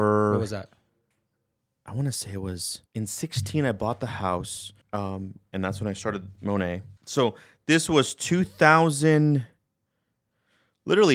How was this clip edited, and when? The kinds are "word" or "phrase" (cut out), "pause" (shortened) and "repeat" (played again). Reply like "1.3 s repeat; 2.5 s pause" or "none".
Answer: 2.9 s pause; 4.8 s pause; 7.0 s pause